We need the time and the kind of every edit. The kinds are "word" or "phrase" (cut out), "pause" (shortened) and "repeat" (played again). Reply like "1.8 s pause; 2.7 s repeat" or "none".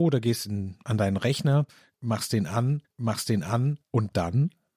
2.8 s repeat